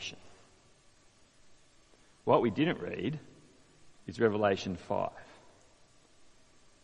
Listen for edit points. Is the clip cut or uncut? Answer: uncut